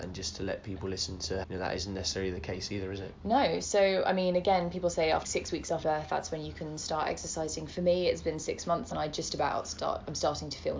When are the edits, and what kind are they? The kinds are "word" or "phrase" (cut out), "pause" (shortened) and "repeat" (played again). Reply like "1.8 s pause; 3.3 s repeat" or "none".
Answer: 1.4 s word; 5.2 s word; 5.8 s word; 8.9 s word